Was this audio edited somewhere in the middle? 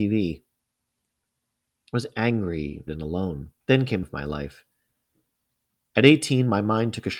yes; 3 cuts; at 2.9 s, 3.6 s, 4.0 s

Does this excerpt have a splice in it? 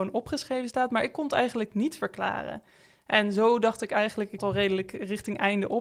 yes; 1 cut; at 4.4 s

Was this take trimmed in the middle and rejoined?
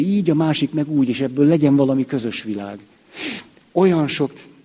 no; 0 cuts

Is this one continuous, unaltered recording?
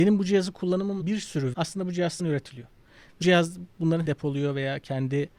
no; 5 cuts; at 1.0 s, 1.5 s, 2.2 s, 3.2 s, 4.0 s

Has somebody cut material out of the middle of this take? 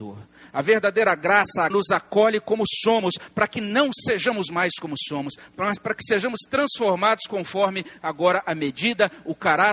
yes; 1 cut; at 1.7 s

